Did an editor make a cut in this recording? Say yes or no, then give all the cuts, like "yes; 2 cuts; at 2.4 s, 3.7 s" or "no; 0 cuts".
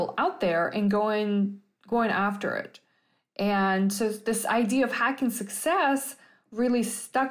no; 0 cuts